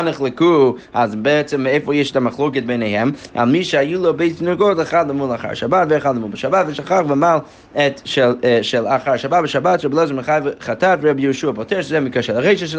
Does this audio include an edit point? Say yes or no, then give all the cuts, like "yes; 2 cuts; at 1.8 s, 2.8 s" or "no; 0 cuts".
no; 0 cuts